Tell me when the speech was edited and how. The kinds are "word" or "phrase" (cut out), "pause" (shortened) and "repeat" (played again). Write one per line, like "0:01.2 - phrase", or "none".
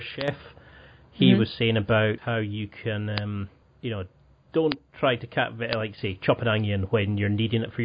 0:03.6 - pause